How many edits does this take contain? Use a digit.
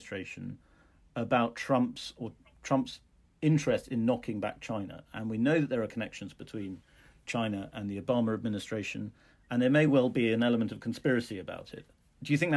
0